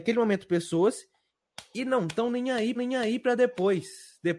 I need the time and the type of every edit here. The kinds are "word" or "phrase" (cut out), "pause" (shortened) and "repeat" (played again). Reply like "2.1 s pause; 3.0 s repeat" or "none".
2.7 s repeat